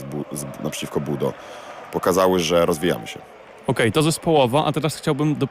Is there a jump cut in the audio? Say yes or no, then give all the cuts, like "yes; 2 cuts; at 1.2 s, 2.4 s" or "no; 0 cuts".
no; 0 cuts